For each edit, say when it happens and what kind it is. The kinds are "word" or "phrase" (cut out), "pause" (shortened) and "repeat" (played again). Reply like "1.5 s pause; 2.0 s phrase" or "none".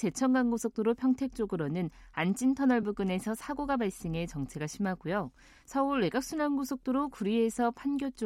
none